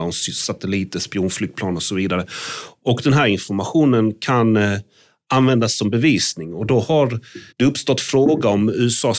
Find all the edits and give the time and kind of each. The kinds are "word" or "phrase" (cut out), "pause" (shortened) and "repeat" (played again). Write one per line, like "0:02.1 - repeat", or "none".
0:07.5 - pause